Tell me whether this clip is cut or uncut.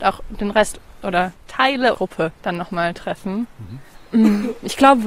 cut